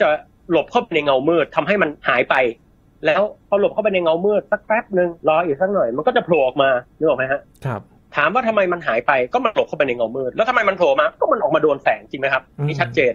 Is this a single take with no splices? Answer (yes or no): no